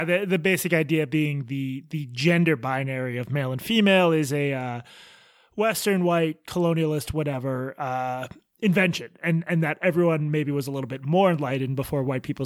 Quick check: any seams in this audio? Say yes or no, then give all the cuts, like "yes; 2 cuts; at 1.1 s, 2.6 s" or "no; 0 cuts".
no; 0 cuts